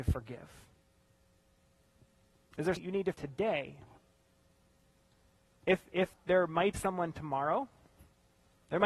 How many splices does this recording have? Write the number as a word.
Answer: four